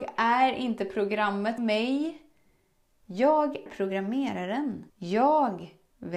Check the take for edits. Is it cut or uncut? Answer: cut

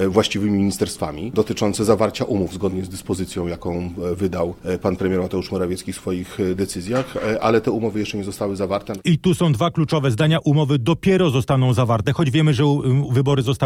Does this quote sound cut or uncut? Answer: uncut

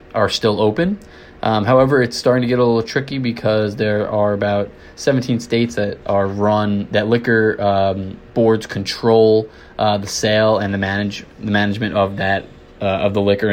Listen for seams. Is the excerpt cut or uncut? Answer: uncut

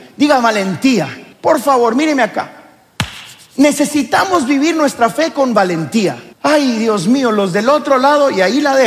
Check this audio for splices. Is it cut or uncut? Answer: cut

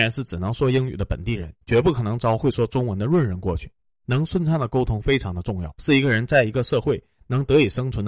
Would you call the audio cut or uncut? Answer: cut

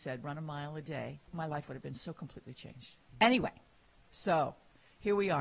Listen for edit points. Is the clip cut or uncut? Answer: cut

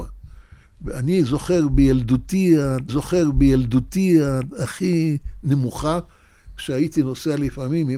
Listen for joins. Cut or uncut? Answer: cut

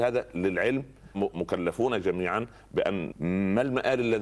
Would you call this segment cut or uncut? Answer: cut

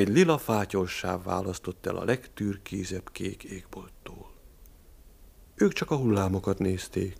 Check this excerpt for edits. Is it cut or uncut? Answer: uncut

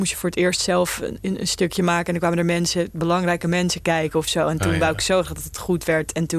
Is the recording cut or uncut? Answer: uncut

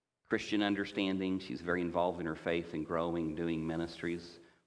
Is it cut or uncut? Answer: uncut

